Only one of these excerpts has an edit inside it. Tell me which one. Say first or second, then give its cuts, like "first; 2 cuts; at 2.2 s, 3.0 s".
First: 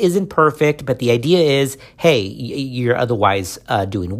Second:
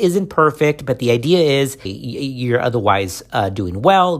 second; 1 cut; at 1.9 s